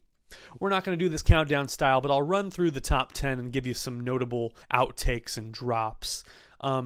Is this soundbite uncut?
no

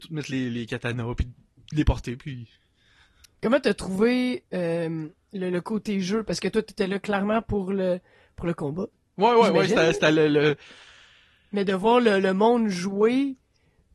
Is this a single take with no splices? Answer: yes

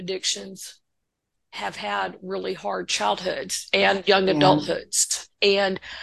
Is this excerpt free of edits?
yes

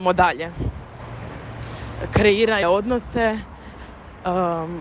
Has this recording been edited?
yes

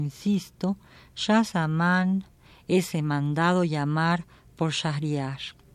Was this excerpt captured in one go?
yes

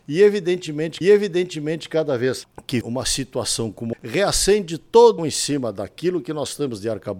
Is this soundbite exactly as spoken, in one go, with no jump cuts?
no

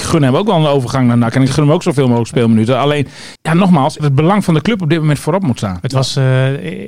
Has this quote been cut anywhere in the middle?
yes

